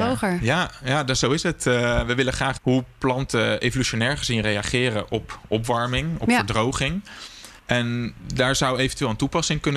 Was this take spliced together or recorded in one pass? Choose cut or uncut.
cut